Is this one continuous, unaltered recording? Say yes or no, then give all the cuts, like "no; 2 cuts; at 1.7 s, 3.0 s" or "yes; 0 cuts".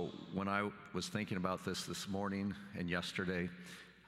yes; 0 cuts